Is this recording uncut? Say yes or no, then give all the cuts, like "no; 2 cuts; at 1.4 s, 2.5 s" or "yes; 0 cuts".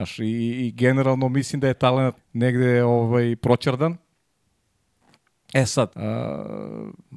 no; 3 cuts; at 1.7 s, 2.2 s, 5.9 s